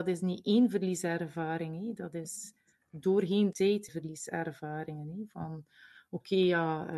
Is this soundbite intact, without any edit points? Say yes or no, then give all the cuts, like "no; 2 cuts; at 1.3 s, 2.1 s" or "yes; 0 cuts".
no; 2 cuts; at 3.5 s, 3.9 s